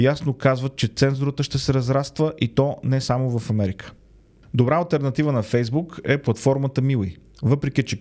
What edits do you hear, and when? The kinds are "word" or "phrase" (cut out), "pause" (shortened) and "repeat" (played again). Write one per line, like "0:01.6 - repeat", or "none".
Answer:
none